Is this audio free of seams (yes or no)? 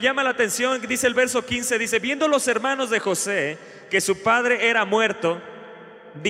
yes